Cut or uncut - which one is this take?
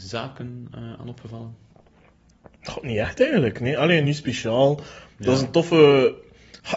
cut